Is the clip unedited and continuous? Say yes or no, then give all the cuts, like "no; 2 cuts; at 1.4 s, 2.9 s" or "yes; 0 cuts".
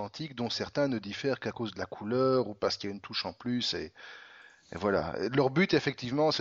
yes; 0 cuts